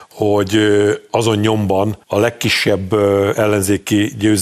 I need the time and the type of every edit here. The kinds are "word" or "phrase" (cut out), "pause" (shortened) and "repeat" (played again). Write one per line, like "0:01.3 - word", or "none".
0:02.0 - pause